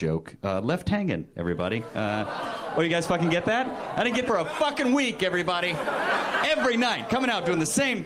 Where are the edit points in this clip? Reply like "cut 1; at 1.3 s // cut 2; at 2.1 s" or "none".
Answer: cut 1; at 4.3 s